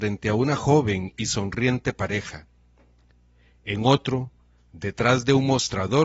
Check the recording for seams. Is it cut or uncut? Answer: uncut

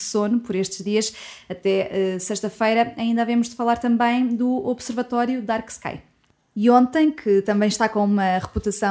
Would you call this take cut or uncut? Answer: uncut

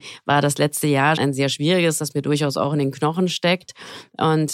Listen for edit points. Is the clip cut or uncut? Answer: cut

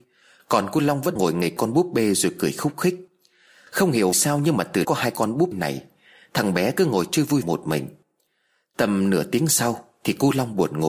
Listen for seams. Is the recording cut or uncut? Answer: cut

